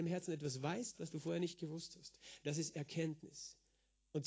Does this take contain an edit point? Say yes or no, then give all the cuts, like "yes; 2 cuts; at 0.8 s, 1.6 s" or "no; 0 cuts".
no; 0 cuts